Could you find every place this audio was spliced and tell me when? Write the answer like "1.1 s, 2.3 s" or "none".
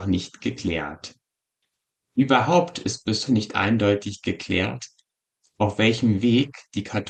3.3 s